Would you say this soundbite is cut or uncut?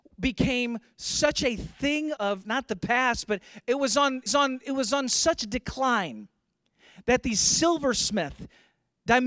cut